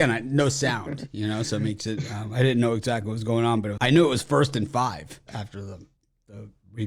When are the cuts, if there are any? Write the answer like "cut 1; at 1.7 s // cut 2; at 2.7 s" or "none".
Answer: cut 1; at 3.8 s // cut 2; at 5.3 s